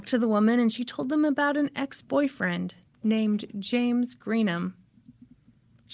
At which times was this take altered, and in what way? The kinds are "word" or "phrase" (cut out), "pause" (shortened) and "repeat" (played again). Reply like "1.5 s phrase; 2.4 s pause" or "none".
none